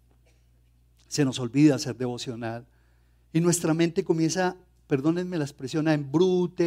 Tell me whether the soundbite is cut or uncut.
uncut